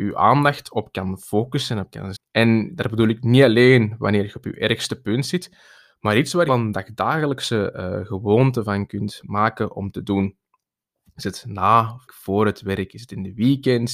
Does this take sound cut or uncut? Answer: cut